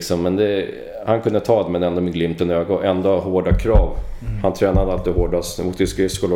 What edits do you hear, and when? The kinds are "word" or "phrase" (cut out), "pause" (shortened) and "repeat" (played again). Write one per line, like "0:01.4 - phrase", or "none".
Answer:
none